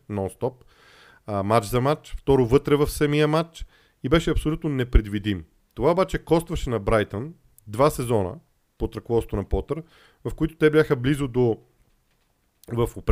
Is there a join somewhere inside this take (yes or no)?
no